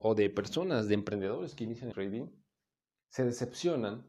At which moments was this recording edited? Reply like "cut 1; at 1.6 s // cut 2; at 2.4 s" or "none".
cut 1; at 1.9 s